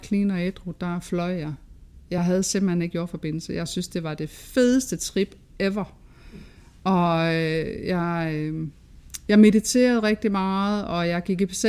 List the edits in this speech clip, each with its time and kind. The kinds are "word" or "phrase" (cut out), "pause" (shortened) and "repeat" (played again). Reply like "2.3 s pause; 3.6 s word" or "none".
none